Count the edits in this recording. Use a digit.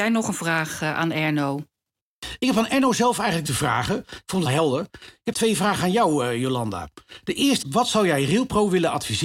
4